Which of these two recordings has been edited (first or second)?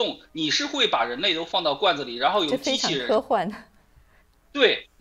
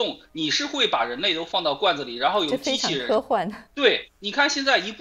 second